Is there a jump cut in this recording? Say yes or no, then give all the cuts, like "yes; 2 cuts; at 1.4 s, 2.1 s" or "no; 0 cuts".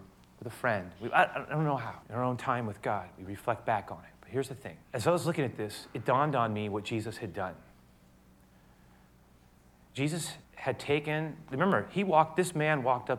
yes; 3 cuts; at 2.0 s, 4.8 s, 10.4 s